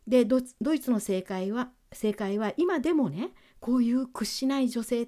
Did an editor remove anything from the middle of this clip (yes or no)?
no